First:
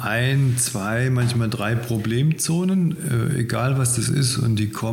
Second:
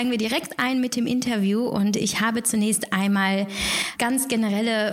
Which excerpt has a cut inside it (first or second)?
second